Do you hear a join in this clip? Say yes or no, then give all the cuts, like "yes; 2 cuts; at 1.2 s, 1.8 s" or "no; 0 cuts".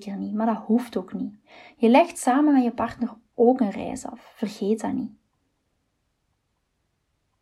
no; 0 cuts